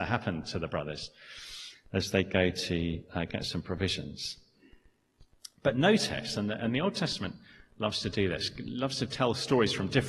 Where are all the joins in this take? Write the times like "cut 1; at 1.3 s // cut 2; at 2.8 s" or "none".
none